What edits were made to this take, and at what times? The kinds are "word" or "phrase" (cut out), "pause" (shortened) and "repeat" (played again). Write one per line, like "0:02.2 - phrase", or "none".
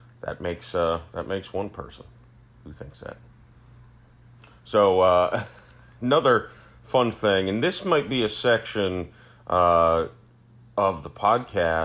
none

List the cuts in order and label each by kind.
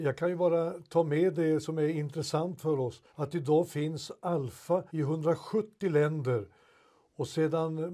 0:03.1 - pause
0:04.9 - pause

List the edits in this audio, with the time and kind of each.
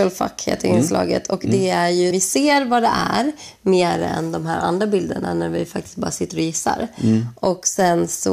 0:02.1 - word

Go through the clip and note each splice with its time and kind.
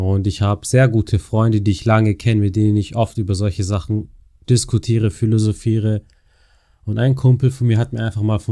none

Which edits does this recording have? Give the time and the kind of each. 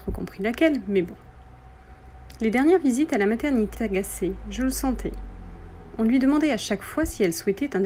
0:03.7 - word

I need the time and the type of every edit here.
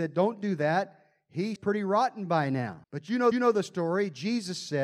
0:01.6 - word
0:02.8 - pause
0:03.3 - repeat

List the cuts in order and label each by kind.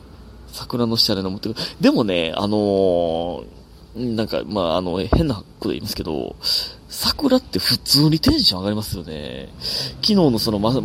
none

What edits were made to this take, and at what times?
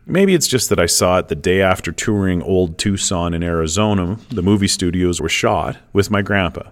0:05.2 - word

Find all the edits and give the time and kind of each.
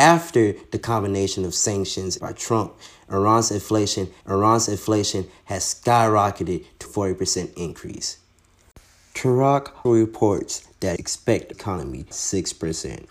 0:02.2 - word
0:04.2 - repeat
0:06.9 - word
0:09.8 - word
0:11.0 - word
0:11.5 - word
0:12.1 - phrase

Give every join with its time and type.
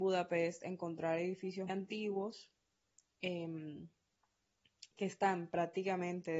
0:01.7 - word

